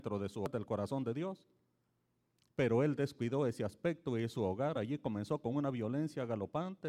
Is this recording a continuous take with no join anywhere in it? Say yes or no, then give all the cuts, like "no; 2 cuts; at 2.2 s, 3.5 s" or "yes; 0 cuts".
yes; 0 cuts